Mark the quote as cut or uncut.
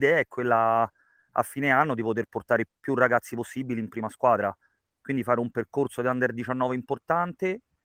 uncut